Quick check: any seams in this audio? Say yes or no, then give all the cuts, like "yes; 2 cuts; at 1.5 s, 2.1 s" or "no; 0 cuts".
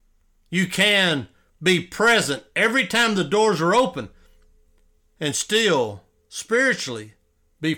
no; 0 cuts